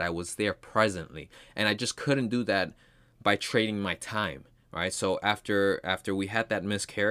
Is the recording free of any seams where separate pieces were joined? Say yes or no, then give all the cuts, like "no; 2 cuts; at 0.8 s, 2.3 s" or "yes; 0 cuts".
yes; 0 cuts